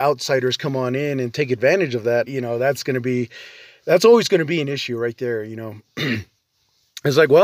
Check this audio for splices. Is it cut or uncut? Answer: cut